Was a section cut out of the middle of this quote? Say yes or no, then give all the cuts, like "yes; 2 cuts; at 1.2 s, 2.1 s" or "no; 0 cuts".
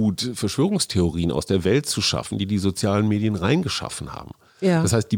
no; 0 cuts